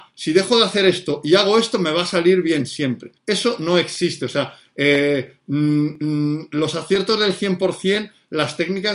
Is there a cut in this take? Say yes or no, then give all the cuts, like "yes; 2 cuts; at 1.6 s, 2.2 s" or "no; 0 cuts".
yes; 1 cut; at 3.2 s